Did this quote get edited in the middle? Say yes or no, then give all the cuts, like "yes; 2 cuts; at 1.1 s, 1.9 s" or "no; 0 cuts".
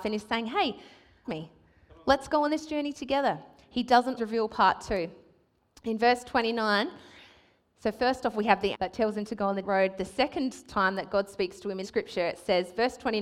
yes; 5 cuts; at 1.2 s, 4.2 s, 8.7 s, 9.6 s, 11.8 s